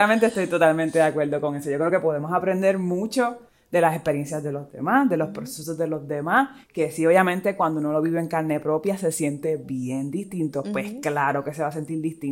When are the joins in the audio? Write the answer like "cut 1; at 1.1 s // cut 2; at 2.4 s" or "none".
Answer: none